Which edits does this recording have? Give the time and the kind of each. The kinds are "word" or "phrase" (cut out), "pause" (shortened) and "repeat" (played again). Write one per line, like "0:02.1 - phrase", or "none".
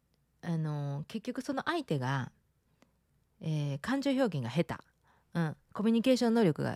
0:05.6 - pause